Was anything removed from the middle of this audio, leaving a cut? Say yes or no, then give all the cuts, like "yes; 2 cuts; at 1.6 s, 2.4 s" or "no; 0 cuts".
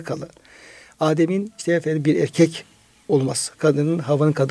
no; 0 cuts